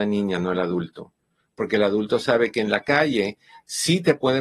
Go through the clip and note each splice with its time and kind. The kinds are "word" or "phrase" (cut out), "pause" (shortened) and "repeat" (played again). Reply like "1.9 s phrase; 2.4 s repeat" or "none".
none